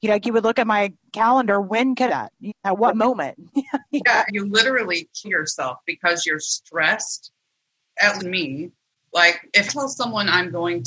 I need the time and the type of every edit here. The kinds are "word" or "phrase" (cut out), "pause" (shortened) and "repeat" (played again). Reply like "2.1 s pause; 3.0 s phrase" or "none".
2.1 s phrase; 2.5 s word; 4.3 s word; 5.2 s word; 8.2 s word; 9.7 s word

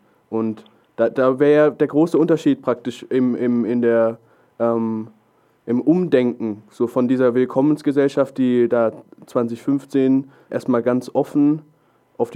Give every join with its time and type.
10.5 s word

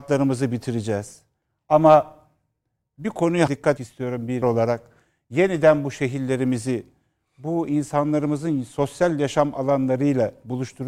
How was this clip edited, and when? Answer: 3.5 s word; 3.8 s word; 4.4 s word

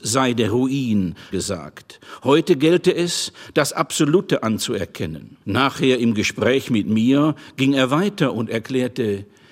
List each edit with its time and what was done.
1.3 s phrase; 5.4 s pause

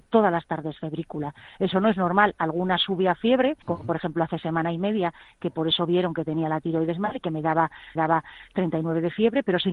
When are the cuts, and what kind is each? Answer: 3.6 s pause; 7.9 s repeat

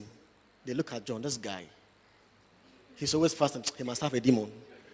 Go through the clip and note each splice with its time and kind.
none

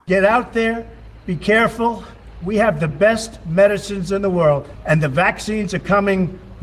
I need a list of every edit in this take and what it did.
none

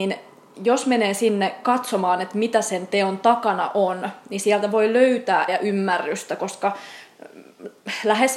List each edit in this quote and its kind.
5.5 s word

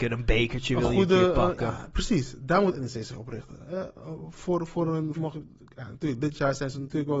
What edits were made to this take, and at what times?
5.2 s phrase

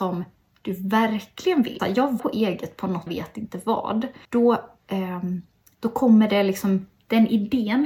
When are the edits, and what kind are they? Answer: 1.8 s word; 2.2 s phrase; 3.1 s phrase; 4.2 s pause

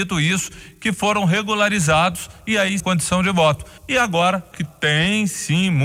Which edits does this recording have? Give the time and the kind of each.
2.8 s phrase; 3.8 s pause; 4.5 s word

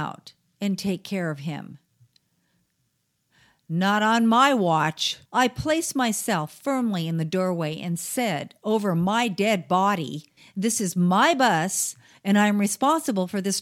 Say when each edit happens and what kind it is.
5.3 s pause; 10.4 s pause

